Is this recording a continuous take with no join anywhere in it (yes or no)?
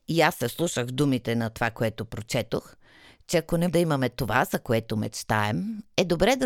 no